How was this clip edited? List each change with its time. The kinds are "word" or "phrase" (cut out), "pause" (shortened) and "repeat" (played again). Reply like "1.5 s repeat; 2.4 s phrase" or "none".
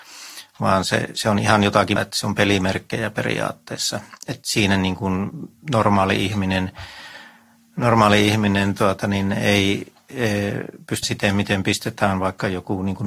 2.0 s word; 11.0 s word